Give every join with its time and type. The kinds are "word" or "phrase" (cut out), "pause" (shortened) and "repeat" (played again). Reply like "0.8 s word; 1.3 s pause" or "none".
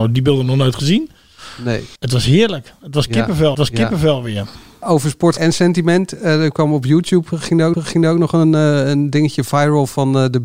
2.0 s pause; 3.5 s repeat; 5.4 s word; 7.7 s repeat